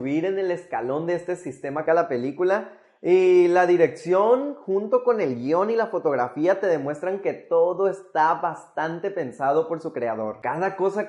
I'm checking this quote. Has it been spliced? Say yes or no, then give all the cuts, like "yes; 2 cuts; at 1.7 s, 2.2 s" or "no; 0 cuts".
yes; 1 cut; at 1.9 s